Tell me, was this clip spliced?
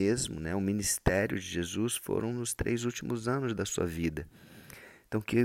no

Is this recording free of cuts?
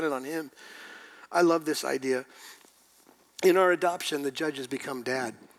yes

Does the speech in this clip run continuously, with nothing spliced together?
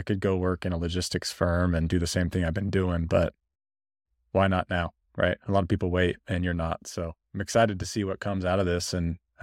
yes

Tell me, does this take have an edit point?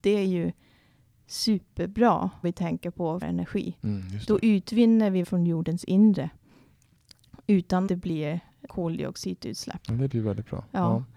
yes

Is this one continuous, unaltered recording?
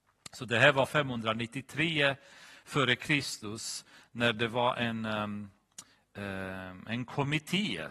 yes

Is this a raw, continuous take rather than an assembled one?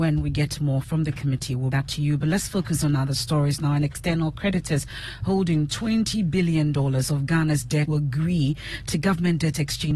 no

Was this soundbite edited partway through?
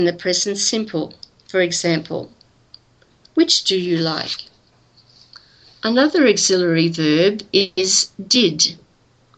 yes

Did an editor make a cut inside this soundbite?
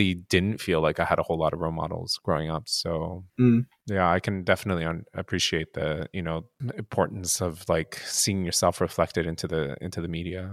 yes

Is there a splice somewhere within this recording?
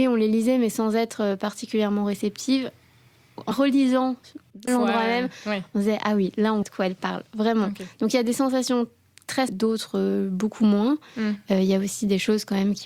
yes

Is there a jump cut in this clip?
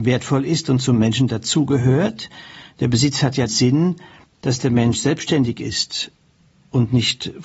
yes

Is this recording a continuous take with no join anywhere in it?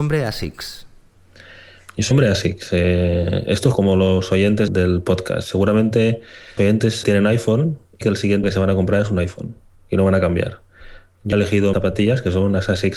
no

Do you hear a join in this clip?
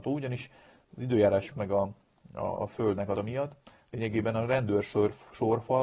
yes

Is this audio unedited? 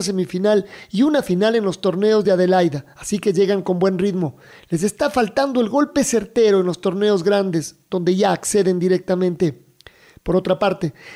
yes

